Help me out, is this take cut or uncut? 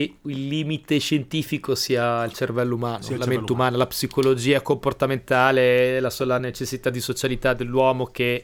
uncut